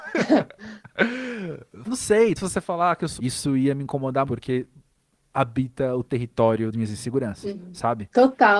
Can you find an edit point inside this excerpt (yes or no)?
yes